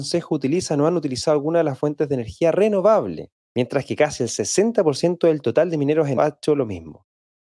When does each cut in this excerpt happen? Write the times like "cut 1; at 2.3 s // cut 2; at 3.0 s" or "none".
cut 1; at 3.4 s // cut 2; at 6.2 s